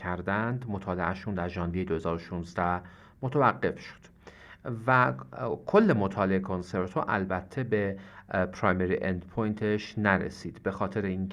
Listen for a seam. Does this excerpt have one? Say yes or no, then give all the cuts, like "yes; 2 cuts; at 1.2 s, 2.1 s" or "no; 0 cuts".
no; 0 cuts